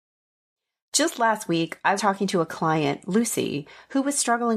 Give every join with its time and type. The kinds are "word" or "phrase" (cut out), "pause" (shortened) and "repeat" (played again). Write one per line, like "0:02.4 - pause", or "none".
0:02.0 - word